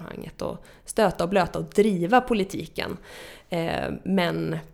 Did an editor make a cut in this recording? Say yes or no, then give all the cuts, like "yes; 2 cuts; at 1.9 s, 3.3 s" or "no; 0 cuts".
no; 0 cuts